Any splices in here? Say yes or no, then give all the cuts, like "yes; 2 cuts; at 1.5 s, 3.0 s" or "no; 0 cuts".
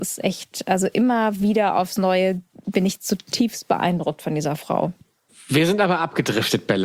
no; 0 cuts